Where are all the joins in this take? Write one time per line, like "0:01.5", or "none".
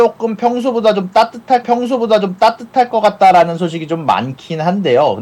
0:01.6